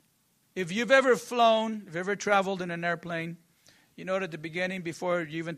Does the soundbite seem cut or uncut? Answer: uncut